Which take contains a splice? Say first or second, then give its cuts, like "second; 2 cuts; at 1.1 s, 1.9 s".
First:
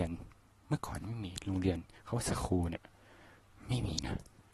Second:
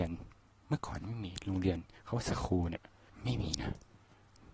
second; 1 cut; at 3.1 s